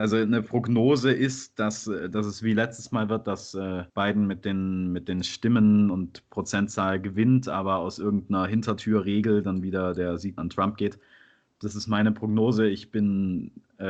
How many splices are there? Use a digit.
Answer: 2